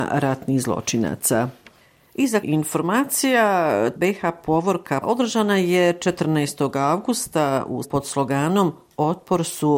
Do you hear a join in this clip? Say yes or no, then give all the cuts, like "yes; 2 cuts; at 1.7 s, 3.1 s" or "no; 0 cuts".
yes; 4 cuts; at 2.4 s, 4.0 s, 5.0 s, 7.8 s